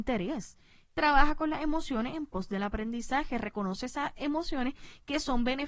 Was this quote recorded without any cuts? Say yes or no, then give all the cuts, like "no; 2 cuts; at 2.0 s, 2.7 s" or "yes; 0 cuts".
yes; 0 cuts